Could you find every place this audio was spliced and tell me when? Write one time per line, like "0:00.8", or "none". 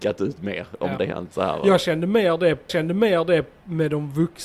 0:01.0
0:02.7